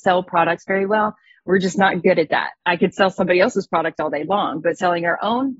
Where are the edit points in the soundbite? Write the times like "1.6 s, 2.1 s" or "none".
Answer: none